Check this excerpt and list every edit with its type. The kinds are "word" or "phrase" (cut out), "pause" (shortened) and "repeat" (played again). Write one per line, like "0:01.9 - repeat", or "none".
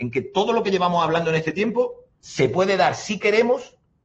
0:02.1 - pause

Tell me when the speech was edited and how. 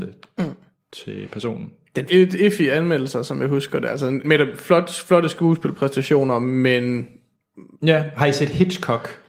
0:02.1 - phrase
0:04.2 - word

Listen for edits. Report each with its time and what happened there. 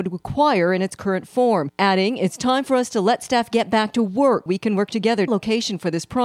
0:04.5 - word
0:05.3 - phrase

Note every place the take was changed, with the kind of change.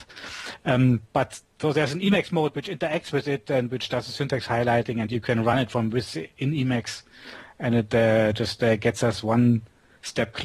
none

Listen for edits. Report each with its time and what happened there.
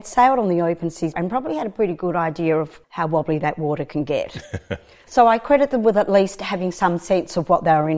0:01.1 - word

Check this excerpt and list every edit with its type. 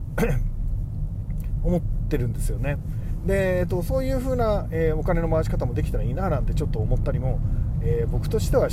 none

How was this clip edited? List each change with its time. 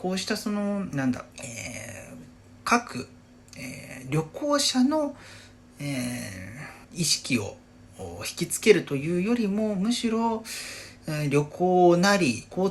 0:01.3 - pause
0:06.8 - pause

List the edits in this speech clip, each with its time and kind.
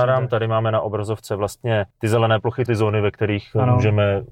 0:01.9 - pause
0:02.7 - phrase

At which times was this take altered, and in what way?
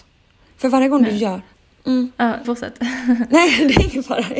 0:01.5 - pause
0:02.4 - word

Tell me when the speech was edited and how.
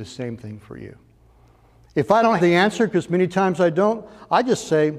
0:02.4 - word

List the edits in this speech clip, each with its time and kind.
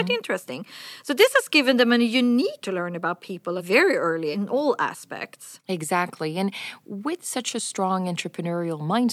0:02.6 - word
0:03.6 - phrase
0:04.3 - phrase

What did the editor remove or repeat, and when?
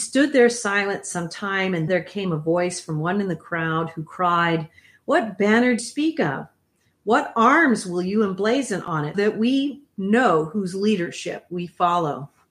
0:01.9 - word
0:05.8 - word
0:09.1 - word

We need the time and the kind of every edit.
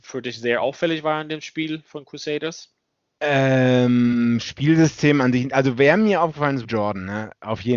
0:06.6 - word

